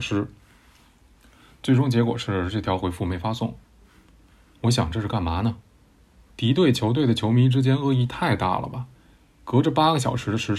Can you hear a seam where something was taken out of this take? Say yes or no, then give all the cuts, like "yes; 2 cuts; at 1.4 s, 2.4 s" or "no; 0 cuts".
no; 0 cuts